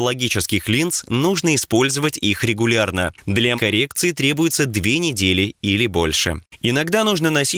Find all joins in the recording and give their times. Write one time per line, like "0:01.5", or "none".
0:03.6